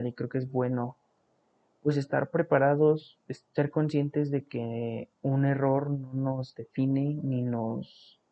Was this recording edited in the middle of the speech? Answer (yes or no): no